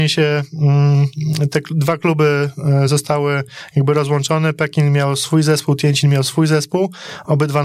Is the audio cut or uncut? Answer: uncut